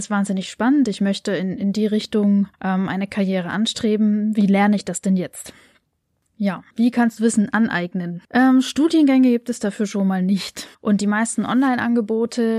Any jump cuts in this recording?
yes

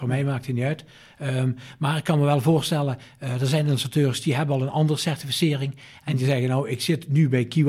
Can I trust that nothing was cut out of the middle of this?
yes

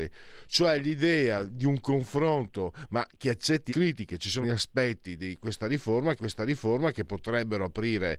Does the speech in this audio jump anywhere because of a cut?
yes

